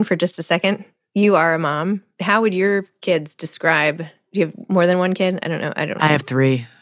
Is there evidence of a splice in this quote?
no; 0 cuts

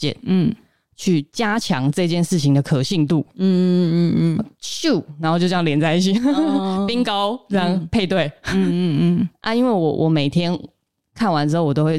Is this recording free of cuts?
yes; 0 cuts

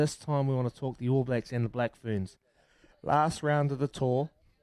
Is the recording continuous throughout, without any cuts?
yes; 0 cuts

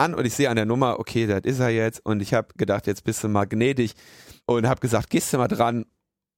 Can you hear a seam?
yes; 1 cut; at 4.4 s

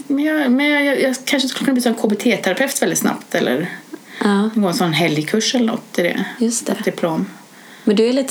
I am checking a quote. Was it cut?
no; 0 cuts

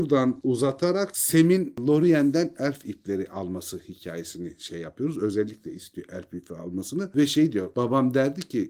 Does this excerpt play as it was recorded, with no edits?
yes; 0 cuts

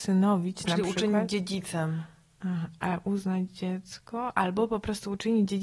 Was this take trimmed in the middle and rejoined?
no; 0 cuts

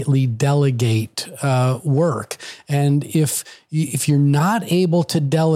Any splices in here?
no; 0 cuts

